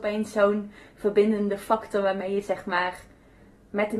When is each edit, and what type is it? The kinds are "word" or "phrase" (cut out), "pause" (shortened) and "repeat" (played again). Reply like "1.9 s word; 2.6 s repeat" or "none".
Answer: none